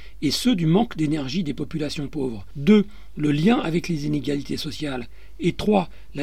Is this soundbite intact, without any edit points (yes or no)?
yes